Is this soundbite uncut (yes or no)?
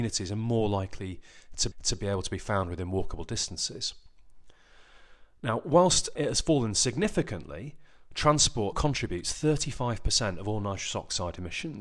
no